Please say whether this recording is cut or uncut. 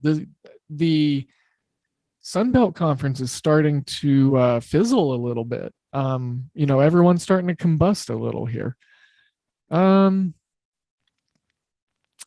uncut